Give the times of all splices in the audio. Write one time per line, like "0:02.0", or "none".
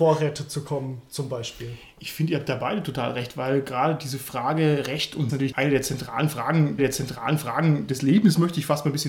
0:05.3
0:06.8